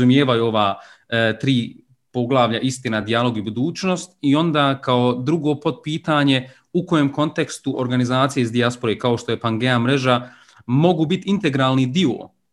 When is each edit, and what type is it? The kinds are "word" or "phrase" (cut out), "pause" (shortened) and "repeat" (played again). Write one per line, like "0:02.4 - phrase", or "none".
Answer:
none